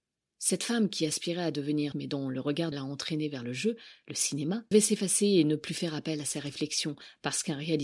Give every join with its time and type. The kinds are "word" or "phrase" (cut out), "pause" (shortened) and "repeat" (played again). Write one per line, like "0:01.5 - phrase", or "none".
0:01.9 - word
0:02.7 - phrase
0:04.7 - word